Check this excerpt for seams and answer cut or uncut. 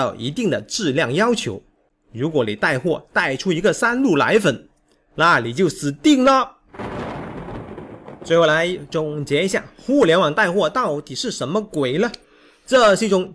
uncut